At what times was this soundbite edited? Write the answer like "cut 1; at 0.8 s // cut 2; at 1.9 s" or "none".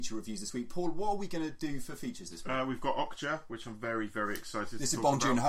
none